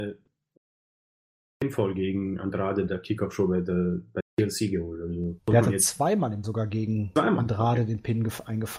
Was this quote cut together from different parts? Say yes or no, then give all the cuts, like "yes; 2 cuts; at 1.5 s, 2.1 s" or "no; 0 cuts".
yes; 3 cuts; at 2.9 s, 5.4 s, 6.4 s